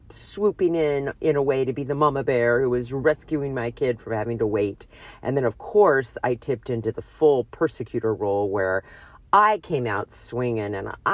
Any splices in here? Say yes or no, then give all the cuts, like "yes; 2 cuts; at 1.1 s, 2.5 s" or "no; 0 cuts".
no; 0 cuts